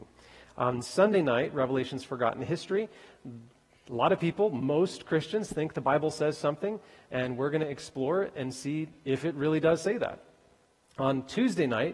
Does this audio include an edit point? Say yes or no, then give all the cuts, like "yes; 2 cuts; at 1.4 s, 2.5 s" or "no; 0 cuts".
no; 0 cuts